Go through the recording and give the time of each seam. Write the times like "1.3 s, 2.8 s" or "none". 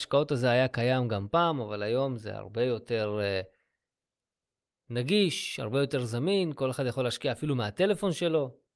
none

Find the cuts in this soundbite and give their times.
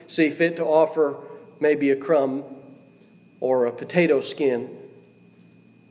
none

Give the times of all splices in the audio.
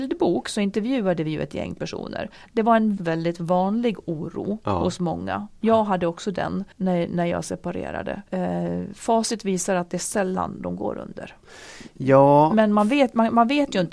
3.0 s, 6.7 s, 8.3 s

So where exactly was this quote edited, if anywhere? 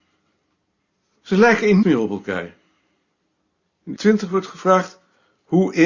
1.8 s, 4.0 s

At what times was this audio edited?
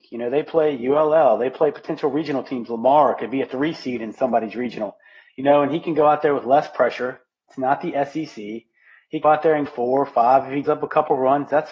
9.2 s, 9.7 s, 10.6 s

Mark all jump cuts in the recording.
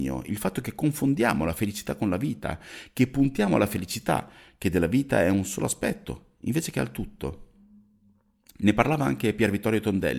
none

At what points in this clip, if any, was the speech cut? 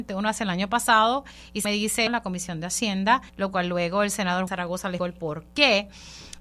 1.6 s, 2.1 s, 3.3 s, 4.5 s, 5.0 s

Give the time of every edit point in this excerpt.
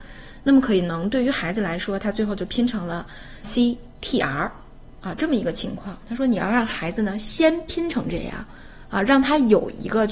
3.4 s

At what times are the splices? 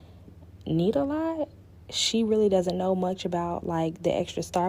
none

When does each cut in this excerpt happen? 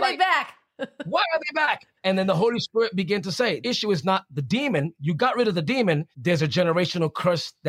2.0 s, 3.6 s, 6.1 s

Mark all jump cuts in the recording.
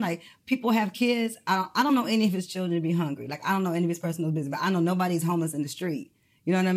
none

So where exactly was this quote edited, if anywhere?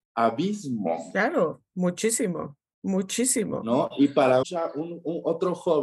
4.4 s

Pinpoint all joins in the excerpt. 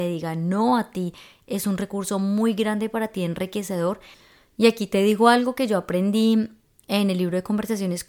none

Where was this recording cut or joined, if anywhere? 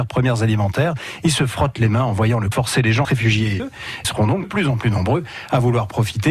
2.5 s, 3.0 s, 3.6 s, 4.0 s, 4.4 s

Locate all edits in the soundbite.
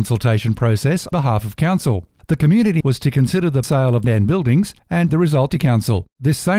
1.1 s, 2.8 s, 3.6 s, 4.0 s, 5.1 s, 5.5 s

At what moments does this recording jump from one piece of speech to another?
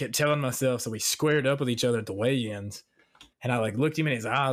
3.3 s

